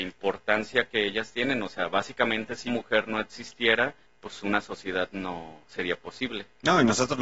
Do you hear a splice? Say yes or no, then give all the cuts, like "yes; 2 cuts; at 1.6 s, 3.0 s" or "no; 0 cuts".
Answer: yes; 2 cuts; at 2.7 s, 4.0 s